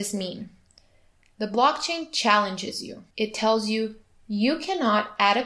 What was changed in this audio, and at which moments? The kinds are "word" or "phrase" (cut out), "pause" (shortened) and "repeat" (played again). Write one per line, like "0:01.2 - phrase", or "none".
0:03.1 - pause